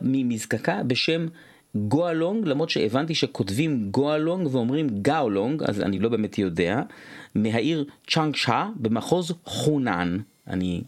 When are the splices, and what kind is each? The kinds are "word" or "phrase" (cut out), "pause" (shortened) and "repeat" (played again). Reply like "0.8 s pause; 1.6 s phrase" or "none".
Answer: none